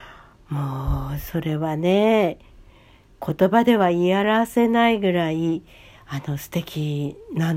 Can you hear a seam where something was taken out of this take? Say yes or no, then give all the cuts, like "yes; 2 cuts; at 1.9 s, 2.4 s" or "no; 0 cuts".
no; 0 cuts